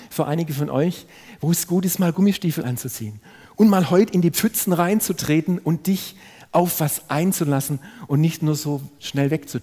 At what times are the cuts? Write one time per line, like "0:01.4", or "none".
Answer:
none